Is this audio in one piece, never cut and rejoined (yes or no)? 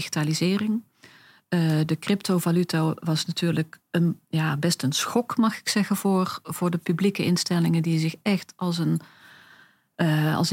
no